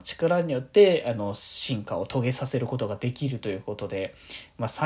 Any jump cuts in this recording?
no; 0 cuts

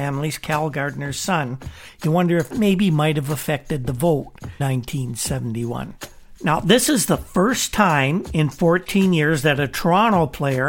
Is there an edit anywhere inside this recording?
yes; 2 cuts; at 2.5 s, 4.6 s

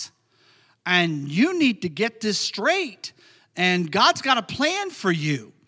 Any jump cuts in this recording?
no; 0 cuts

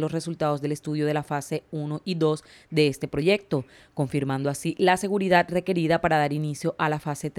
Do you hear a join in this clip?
no; 0 cuts

